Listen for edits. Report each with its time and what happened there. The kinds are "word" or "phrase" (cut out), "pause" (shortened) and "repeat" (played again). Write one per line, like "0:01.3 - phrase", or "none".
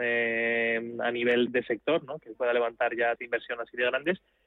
0:01.5 - word
0:02.3 - word
0:03.2 - word